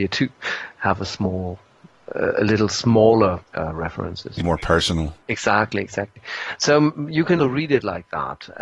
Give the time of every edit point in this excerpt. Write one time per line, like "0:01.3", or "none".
0:03.5
0:04.4
0:05.2
0:07.4